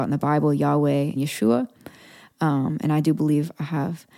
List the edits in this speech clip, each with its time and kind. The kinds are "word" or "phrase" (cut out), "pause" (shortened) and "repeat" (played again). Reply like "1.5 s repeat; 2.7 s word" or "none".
1.2 s word